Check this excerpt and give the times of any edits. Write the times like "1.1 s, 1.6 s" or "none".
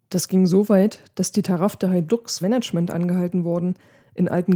2.4 s